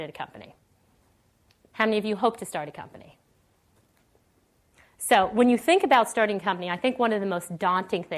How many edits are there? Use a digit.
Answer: 0